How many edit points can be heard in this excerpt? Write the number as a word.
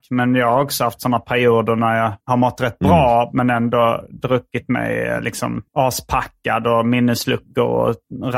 two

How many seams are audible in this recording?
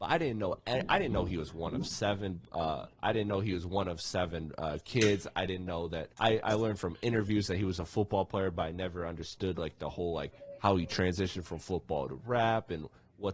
two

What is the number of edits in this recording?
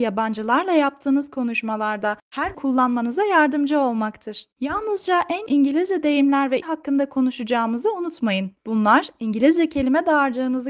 five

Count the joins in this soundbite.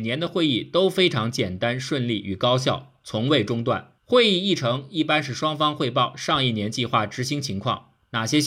one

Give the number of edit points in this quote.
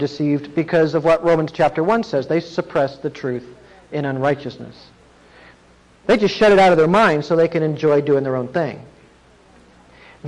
zero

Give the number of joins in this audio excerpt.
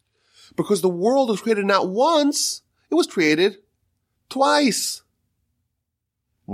zero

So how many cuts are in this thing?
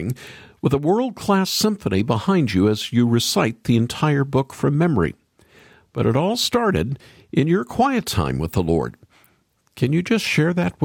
zero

